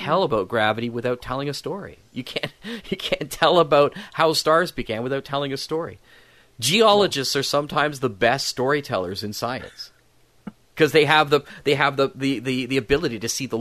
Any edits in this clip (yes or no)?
no